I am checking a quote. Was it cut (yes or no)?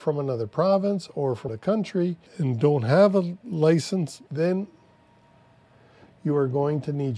yes